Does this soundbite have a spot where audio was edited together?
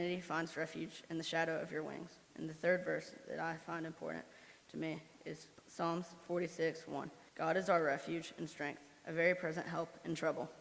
yes; 2 cuts; at 2.2 s, 7.3 s

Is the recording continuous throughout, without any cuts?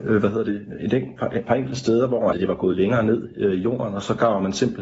no; 1 cut; at 2.3 s

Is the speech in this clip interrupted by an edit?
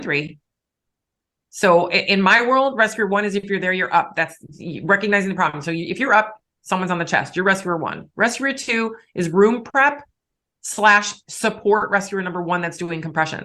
no; 0 cuts

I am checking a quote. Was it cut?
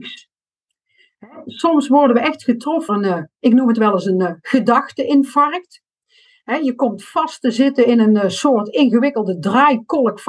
yes; 1 cut; at 2.9 s

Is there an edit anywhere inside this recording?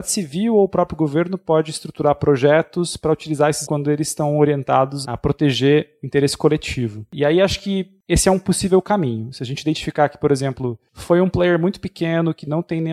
yes; 2 cuts; at 3.6 s, 5.0 s

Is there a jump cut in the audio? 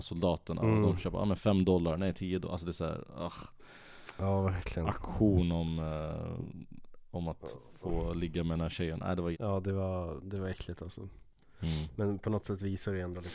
yes; 1 cut; at 9.3 s

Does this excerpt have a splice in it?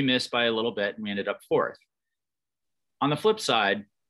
no; 0 cuts

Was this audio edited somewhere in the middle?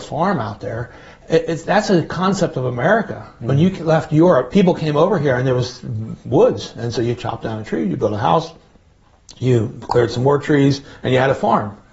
no; 0 cuts

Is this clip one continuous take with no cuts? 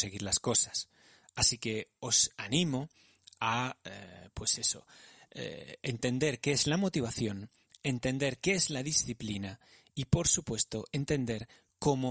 yes; 0 cuts

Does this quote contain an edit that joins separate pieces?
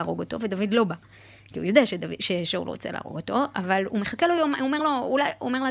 no; 0 cuts

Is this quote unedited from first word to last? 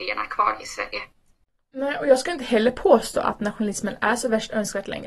yes; 0 cuts

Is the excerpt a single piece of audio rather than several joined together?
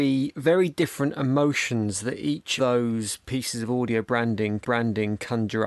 no; 2 cuts; at 2.6 s, 4.6 s

